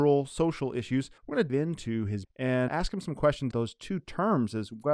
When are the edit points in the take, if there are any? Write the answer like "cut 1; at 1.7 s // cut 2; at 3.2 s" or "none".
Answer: cut 1; at 1.2 s // cut 2; at 1.5 s // cut 3; at 2.2 s // cut 4; at 2.7 s // cut 5; at 3.5 s